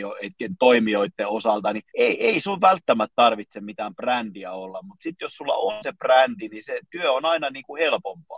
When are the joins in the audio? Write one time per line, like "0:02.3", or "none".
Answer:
0:01.9